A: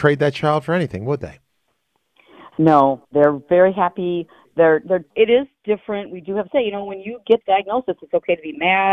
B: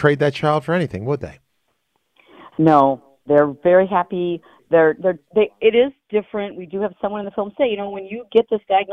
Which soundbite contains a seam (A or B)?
A